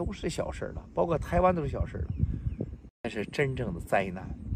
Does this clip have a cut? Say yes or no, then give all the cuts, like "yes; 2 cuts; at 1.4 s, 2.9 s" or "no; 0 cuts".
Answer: yes; 1 cut; at 2.9 s